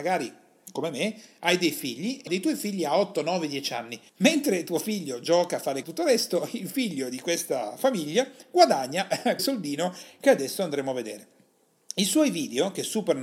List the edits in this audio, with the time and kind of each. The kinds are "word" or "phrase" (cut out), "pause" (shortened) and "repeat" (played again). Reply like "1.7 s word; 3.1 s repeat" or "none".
2.3 s word; 4.1 s pause; 5.8 s phrase; 9.4 s word